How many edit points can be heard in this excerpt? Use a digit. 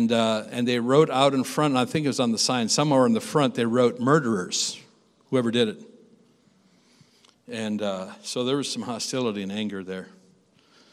0